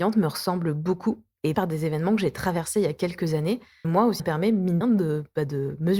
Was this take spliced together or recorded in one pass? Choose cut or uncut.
cut